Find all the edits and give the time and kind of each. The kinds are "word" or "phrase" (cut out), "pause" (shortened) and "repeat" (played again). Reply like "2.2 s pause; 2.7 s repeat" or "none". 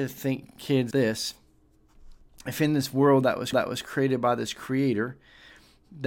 0.9 s word; 3.5 s repeat